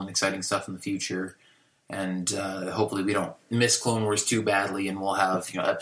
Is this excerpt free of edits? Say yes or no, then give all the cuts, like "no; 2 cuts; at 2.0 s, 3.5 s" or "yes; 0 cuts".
yes; 0 cuts